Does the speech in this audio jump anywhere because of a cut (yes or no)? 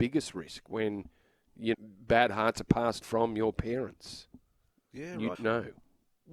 yes